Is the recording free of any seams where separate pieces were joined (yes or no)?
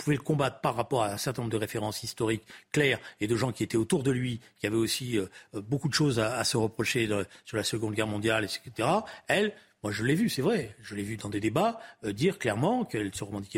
yes